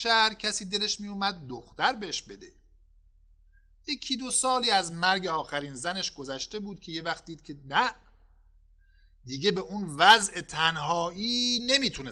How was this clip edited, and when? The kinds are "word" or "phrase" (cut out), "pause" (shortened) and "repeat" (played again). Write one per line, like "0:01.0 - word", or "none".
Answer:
none